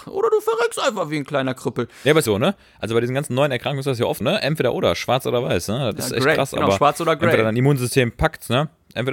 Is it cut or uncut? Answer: cut